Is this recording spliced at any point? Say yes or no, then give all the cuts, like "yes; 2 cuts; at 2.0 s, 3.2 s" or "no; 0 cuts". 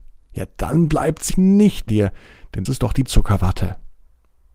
yes; 4 cuts; at 1.3 s, 1.9 s, 2.7 s, 3.1 s